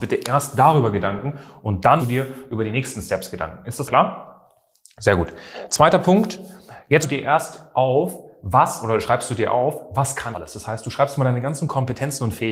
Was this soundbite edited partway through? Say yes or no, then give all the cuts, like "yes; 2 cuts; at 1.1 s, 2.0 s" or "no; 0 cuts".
yes; 4 cuts; at 2.0 s, 3.9 s, 7.0 s, 10.3 s